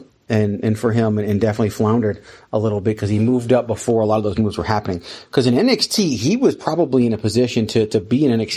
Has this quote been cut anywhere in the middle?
no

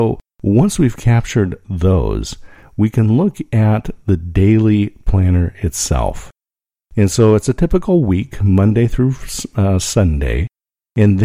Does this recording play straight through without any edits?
yes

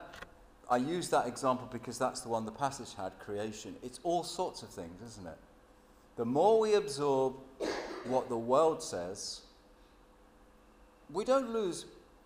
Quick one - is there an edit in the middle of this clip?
no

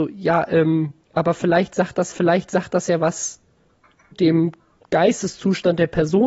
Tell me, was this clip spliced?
yes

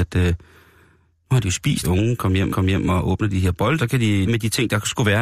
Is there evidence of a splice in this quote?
yes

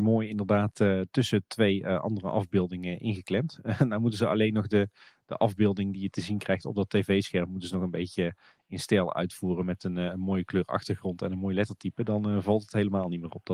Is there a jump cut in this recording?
no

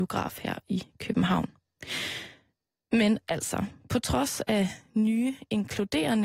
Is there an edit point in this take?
no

